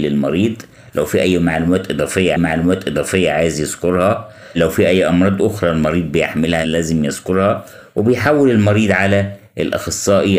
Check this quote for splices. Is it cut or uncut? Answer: cut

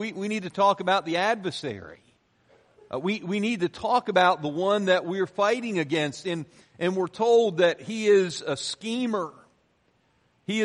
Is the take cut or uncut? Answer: uncut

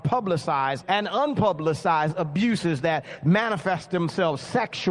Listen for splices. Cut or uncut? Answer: uncut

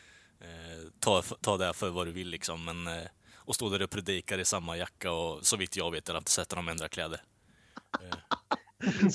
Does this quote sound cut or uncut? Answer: cut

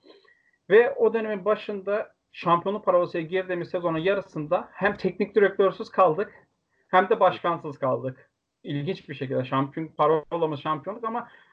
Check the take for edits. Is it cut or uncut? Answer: uncut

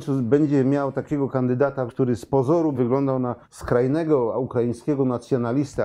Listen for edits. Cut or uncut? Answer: cut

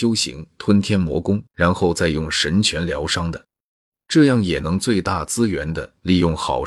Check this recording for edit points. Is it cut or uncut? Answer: cut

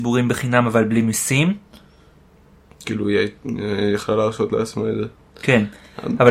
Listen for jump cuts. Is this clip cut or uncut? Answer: uncut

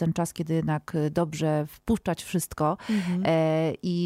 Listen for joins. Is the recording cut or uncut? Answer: uncut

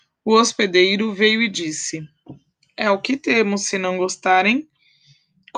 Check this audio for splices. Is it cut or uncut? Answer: uncut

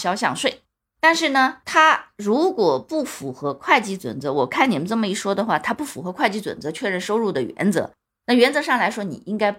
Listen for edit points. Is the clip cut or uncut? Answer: uncut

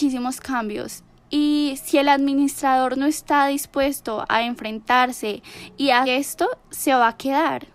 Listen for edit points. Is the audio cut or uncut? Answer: cut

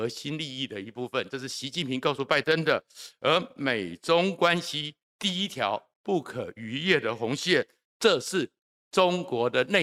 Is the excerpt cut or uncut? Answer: uncut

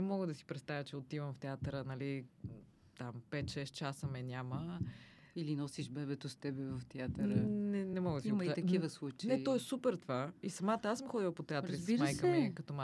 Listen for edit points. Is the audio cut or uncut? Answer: uncut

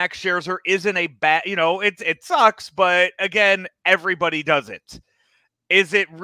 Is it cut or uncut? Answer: uncut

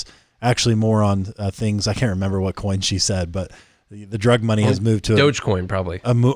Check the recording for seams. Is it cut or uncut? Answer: uncut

